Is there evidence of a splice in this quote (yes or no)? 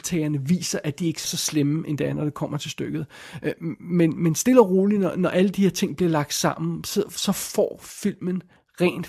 yes